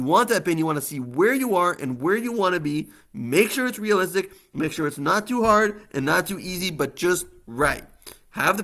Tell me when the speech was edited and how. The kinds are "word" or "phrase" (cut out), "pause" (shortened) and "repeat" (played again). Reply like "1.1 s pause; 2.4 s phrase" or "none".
none